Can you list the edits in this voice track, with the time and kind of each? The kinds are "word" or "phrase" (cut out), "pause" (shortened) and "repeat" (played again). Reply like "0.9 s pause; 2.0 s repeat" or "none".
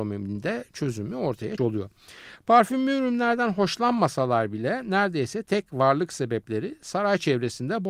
1.6 s word